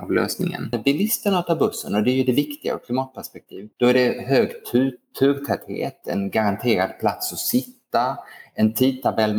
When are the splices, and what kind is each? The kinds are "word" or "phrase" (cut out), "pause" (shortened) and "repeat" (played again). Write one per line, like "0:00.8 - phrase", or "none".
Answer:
0:03.7 - pause

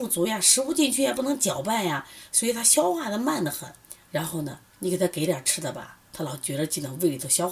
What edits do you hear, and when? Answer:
0:04.6 - pause

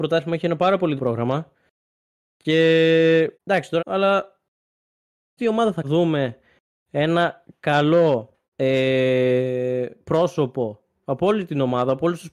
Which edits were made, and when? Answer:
0:01.0 - word
0:03.3 - pause
0:03.8 - word
0:05.4 - word
0:05.8 - phrase
0:08.4 - pause

